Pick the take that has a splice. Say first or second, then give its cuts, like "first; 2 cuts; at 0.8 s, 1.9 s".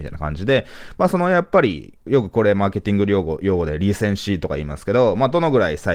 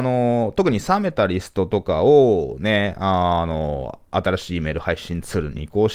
first; 1 cut; at 2.1 s